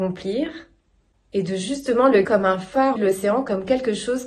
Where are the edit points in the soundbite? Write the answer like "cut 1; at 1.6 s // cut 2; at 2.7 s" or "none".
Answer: cut 1; at 2.2 s // cut 2; at 3.0 s